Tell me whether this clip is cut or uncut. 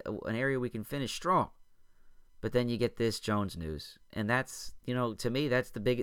cut